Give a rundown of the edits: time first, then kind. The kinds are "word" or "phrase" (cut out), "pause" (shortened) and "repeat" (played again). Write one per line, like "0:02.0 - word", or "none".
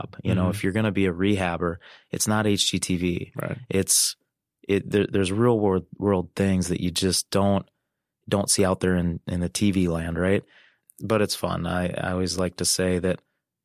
none